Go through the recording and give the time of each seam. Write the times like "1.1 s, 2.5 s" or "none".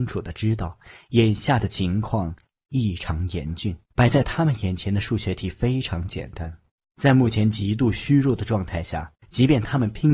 3.8 s, 6.7 s, 9.2 s